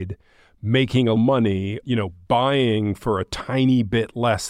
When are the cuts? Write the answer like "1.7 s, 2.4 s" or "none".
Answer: 1.1 s, 1.8 s